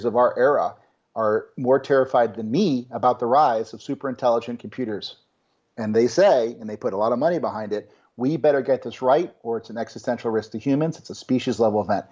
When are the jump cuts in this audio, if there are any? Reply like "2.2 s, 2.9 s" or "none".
none